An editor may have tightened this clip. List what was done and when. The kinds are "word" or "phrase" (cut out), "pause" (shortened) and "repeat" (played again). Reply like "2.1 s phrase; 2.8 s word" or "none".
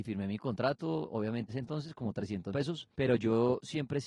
1.5 s phrase; 2.5 s word

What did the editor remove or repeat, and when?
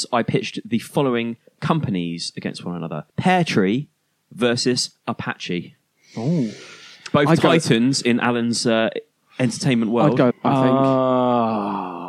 3.1 s pause; 10.3 s word

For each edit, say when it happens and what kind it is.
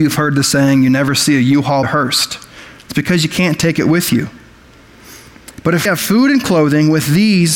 1.8 s word; 5.9 s word

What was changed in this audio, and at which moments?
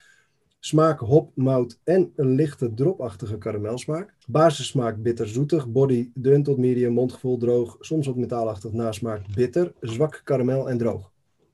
4.2 s pause

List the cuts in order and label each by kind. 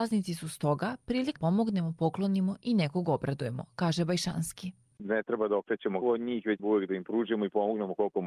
1.4 s word; 6.0 s word; 6.6 s word

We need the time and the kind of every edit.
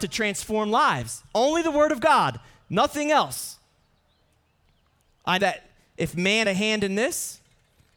5.4 s word; 6.4 s word

